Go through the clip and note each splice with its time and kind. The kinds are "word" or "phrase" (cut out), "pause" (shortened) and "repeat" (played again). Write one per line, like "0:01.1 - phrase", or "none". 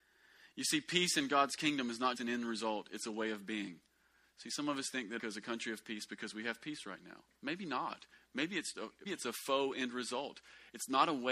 0:02.2 - word
0:05.2 - word
0:08.7 - word
0:09.1 - word